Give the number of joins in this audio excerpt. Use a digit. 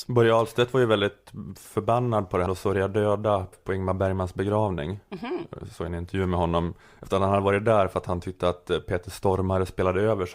3